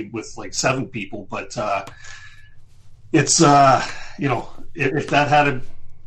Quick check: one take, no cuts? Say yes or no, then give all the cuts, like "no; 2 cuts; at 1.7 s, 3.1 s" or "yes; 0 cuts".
yes; 0 cuts